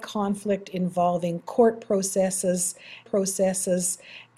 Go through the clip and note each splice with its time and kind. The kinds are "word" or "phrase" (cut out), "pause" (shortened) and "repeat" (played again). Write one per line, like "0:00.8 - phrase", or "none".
0:03.1 - repeat